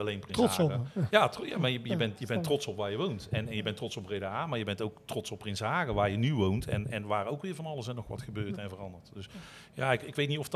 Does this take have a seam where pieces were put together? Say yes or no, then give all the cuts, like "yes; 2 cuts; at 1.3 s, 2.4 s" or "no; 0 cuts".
no; 0 cuts